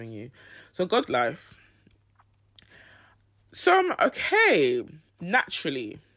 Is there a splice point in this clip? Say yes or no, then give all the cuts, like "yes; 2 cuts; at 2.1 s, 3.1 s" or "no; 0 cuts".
yes; 2 cuts; at 1.1 s, 5.1 s